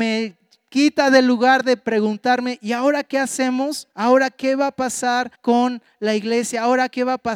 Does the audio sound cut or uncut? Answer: cut